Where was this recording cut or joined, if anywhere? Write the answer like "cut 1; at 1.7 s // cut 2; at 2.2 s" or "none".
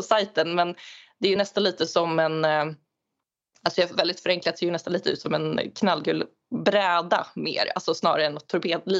none